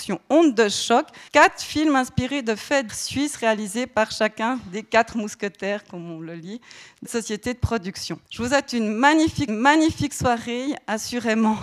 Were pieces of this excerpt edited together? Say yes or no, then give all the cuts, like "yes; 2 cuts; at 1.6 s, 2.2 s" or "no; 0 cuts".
yes; 5 cuts; at 1.3 s, 2.9 s, 7.0 s, 8.3 s, 9.5 s